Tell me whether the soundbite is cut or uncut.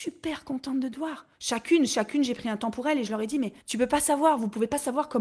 cut